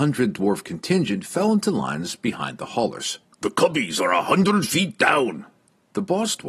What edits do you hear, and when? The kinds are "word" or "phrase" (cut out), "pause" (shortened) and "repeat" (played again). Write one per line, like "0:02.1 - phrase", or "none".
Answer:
0:03.2 - pause

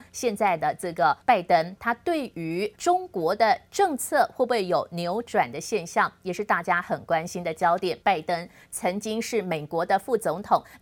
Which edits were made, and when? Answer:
0:01.2 - pause
0:01.8 - word
0:02.7 - pause
0:08.0 - pause

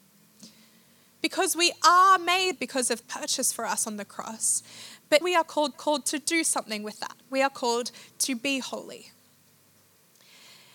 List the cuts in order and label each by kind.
0:02.5 - word
0:03.0 - phrase
0:05.2 - word
0:05.7 - repeat
0:07.2 - pause

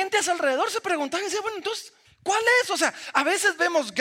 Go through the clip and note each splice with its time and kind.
0:02.0 - pause

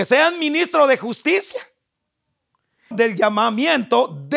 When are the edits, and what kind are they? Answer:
0:02.9 - word

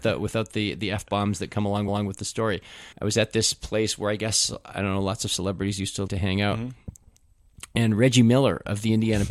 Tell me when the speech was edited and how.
0:01.9 - repeat
0:02.9 - pause
0:06.1 - word

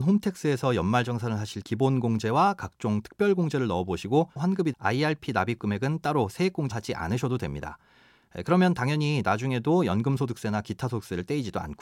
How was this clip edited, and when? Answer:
0:01.6 - word
0:04.4 - word
0:04.7 - word
0:06.7 - word

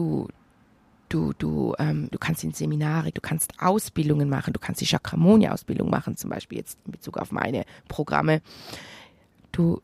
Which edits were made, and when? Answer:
0:02.1 - word
0:03.1 - word

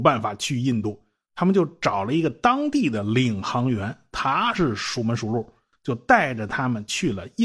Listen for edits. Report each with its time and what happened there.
none

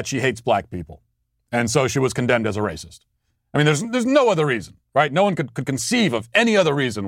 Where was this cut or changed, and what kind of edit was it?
none

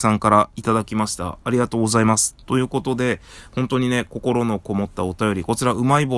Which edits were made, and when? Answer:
0:01.4 - pause

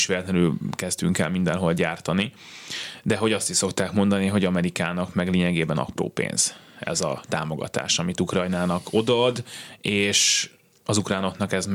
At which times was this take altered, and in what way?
none

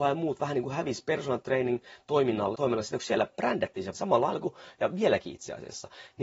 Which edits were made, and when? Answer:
0:02.5 - word
0:03.9 - word

